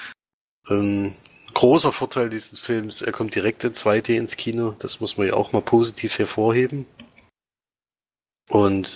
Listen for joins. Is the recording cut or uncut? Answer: uncut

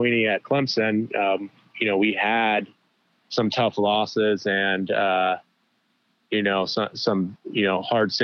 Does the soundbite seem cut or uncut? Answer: uncut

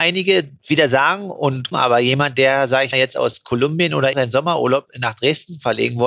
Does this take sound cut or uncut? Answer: cut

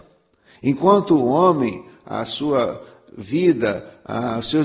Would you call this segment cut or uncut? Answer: uncut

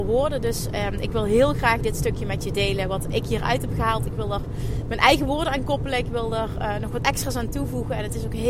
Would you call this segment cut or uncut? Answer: uncut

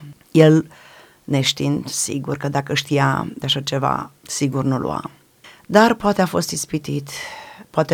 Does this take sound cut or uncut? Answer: cut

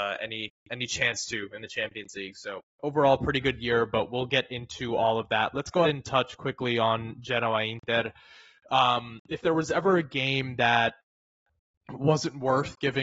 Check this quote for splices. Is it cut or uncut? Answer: cut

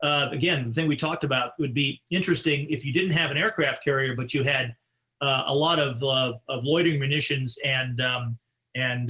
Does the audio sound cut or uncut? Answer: uncut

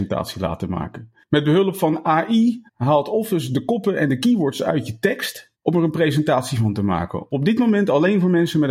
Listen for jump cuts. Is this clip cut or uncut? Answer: cut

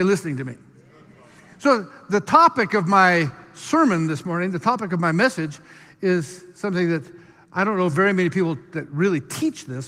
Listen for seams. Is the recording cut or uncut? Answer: uncut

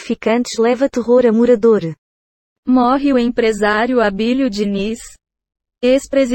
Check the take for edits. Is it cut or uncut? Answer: uncut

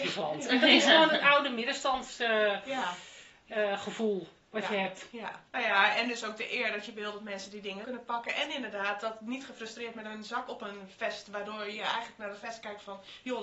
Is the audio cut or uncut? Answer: cut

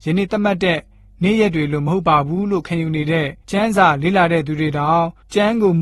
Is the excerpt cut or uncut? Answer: cut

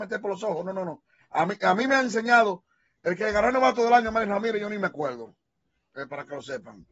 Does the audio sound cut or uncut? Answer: uncut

